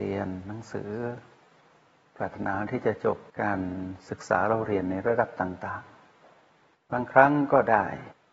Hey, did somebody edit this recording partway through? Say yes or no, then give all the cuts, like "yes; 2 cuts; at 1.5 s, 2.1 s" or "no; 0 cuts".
yes; 1 cut; at 3.3 s